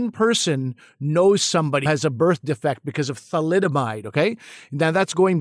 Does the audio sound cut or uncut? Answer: cut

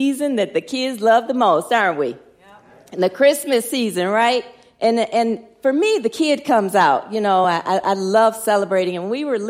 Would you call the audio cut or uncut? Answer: uncut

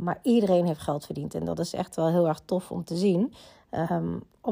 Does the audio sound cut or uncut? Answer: uncut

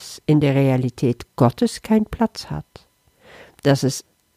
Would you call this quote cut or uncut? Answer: uncut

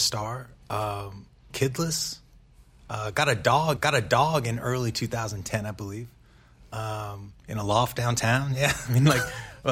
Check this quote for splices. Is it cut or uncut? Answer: cut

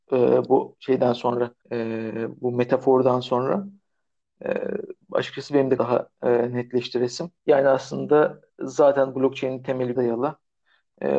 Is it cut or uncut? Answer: cut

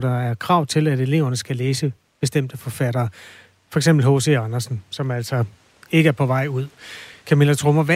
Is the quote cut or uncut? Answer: uncut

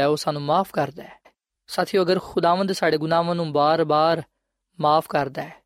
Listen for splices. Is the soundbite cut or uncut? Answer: uncut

